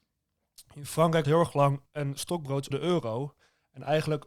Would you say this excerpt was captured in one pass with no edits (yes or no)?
no